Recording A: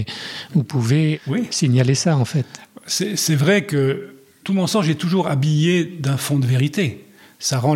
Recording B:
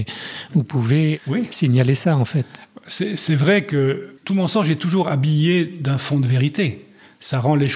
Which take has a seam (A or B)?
B